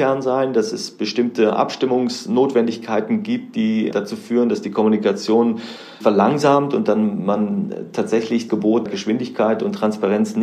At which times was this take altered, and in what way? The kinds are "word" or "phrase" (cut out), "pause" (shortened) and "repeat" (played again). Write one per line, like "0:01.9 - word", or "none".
0:03.9 - word
0:06.0 - word
0:08.5 - word
0:08.9 - word